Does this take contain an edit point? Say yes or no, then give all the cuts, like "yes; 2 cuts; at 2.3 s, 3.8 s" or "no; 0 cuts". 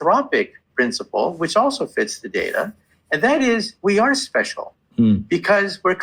no; 0 cuts